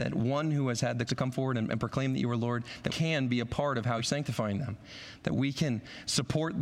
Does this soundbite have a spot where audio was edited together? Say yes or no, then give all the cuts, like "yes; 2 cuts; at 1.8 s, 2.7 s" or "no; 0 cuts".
yes; 3 cuts; at 1.1 s, 2.9 s, 4.0 s